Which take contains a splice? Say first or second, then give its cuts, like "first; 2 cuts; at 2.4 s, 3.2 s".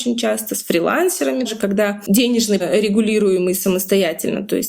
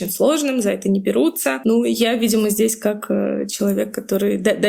first; 2 cuts; at 1.4 s, 2.6 s